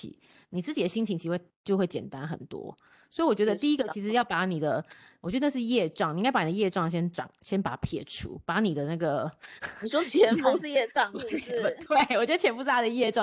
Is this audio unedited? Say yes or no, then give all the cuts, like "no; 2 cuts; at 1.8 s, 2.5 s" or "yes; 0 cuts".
yes; 0 cuts